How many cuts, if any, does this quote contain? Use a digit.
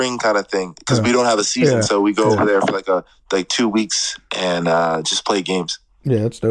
1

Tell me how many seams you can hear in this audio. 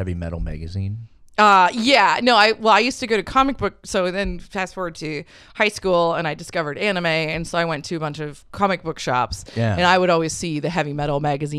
0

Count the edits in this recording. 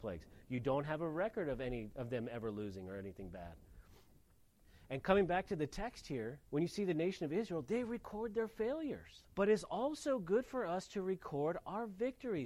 2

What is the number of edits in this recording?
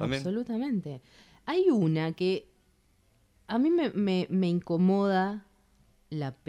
0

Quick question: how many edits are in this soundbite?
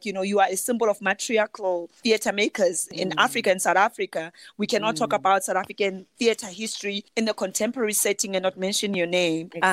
0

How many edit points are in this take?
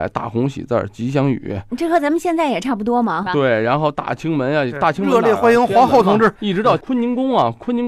1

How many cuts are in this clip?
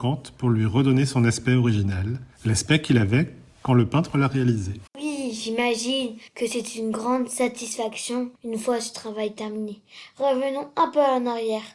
4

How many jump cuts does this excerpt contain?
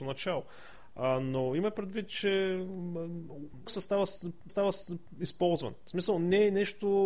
2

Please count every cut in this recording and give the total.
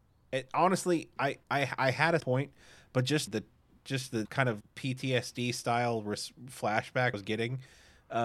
6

